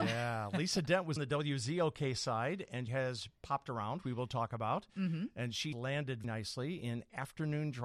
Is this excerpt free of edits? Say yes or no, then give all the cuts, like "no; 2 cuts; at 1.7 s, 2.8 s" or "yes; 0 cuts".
no; 5 cuts; at 1.2 s, 2.9 s, 4.0 s, 5.7 s, 6.2 s